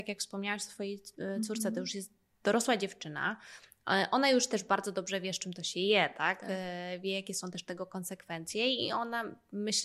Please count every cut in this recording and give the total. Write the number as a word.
zero